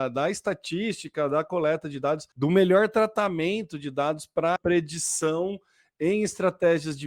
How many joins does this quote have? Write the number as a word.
two